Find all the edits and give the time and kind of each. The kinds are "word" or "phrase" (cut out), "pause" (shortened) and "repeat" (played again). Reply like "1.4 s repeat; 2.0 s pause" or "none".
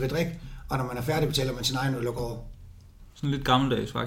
none